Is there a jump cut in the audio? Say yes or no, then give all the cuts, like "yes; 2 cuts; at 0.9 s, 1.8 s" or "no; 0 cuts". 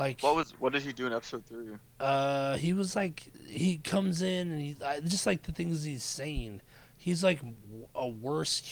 no; 0 cuts